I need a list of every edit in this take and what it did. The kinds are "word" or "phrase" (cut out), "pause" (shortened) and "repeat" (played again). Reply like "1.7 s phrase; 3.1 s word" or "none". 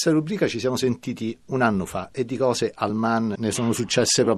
none